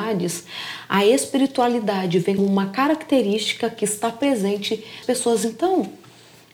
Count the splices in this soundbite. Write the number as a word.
two